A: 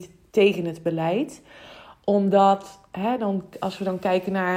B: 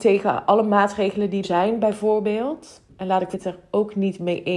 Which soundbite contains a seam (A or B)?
B